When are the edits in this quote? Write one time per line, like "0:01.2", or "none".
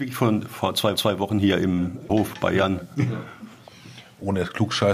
0:01.0
0:02.1